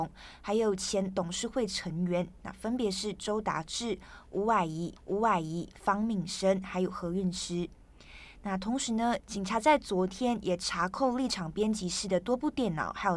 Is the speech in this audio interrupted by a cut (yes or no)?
yes